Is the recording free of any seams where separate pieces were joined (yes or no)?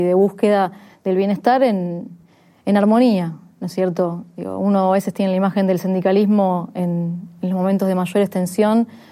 yes